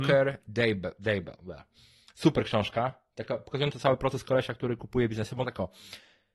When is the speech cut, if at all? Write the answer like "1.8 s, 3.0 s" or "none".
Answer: 5.4 s